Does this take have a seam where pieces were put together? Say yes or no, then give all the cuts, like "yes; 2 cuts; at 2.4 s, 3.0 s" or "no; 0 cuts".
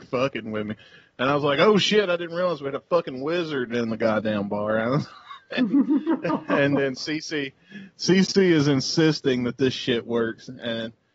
no; 0 cuts